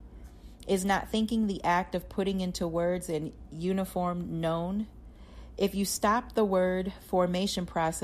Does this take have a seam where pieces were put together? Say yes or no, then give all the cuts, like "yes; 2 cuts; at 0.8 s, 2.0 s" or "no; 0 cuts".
no; 0 cuts